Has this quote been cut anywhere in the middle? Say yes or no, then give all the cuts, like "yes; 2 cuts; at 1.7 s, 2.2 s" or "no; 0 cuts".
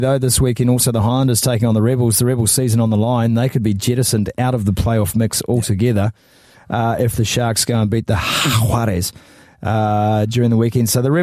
no; 0 cuts